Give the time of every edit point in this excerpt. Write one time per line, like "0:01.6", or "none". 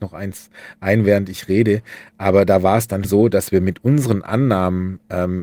0:03.0

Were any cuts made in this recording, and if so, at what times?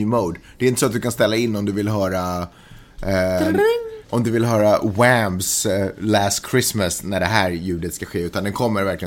0:04.0

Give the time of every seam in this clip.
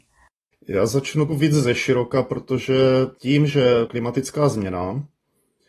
0:01.3
0:03.9

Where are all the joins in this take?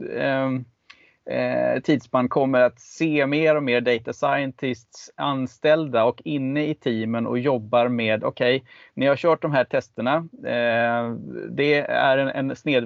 none

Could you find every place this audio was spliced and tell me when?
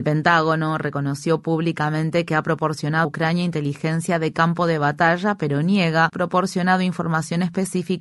0:03.0
0:06.1

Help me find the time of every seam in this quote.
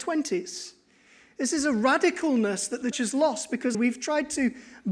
0:02.9
0:03.7

